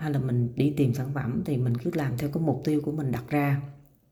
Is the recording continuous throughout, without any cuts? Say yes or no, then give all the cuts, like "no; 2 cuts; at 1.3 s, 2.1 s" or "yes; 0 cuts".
yes; 0 cuts